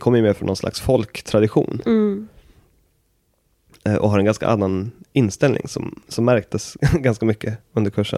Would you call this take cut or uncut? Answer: uncut